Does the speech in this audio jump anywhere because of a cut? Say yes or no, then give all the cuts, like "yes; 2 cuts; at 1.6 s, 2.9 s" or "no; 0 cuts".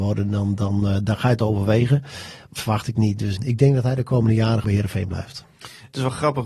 yes; 3 cuts; at 2.6 s, 3.4 s, 4.6 s